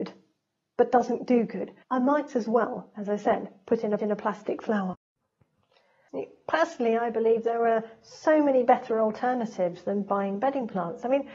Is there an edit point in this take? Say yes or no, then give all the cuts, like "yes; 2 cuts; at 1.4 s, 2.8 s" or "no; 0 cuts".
yes; 2 cuts; at 1.8 s, 4.0 s